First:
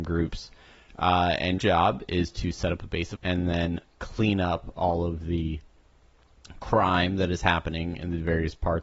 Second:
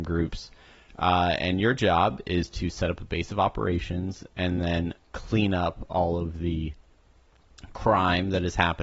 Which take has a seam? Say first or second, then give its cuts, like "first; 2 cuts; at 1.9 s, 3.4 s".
first; 2 cuts; at 1.6 s, 3.2 s